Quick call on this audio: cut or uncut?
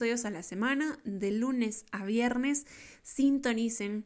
uncut